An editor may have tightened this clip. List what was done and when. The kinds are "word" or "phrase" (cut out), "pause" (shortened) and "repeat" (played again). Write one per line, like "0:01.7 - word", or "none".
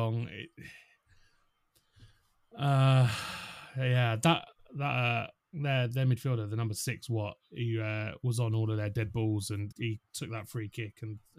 0:09.7 - word